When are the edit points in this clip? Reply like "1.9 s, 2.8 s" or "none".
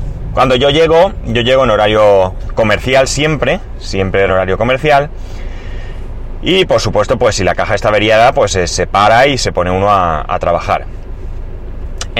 4.3 s